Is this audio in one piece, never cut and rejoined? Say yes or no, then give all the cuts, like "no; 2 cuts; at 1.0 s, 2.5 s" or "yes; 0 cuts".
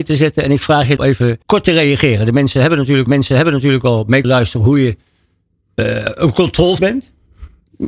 no; 5 cuts; at 1.0 s, 1.4 s, 3.1 s, 4.2 s, 6.8 s